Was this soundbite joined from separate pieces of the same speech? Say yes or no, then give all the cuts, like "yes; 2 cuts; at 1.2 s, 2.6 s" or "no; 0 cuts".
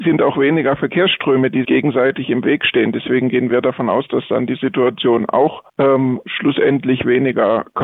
yes; 2 cuts; at 1.6 s, 5.7 s